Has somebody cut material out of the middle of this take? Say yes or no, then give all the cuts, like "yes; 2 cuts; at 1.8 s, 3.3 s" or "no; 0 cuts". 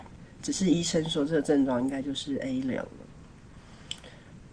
no; 0 cuts